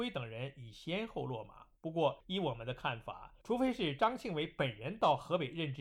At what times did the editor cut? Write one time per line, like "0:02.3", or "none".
0:01.8